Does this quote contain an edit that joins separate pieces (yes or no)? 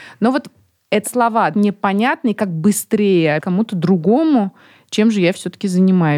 yes